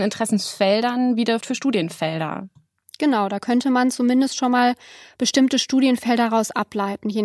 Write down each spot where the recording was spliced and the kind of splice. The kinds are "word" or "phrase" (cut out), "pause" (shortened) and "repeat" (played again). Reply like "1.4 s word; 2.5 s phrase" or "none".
1.4 s word